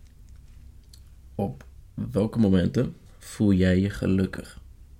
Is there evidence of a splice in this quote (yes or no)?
no